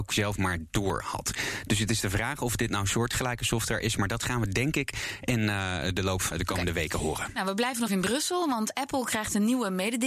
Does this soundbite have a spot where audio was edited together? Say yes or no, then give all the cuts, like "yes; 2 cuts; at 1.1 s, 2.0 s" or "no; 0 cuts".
yes; 2 cuts; at 6.3 s, 7.9 s